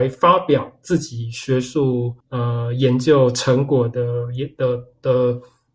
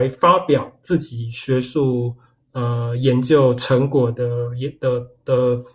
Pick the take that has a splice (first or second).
first